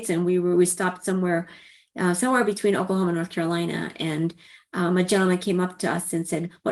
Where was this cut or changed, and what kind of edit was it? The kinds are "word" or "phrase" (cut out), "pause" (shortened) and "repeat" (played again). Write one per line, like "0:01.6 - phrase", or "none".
none